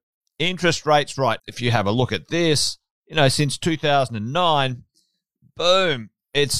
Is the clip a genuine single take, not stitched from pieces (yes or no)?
no